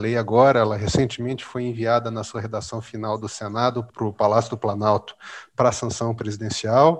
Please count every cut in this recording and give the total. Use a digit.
0